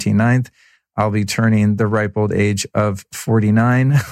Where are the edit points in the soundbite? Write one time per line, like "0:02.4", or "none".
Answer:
none